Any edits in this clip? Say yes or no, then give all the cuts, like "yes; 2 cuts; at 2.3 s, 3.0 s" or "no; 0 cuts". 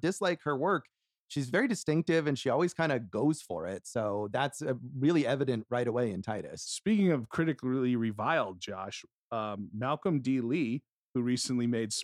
no; 0 cuts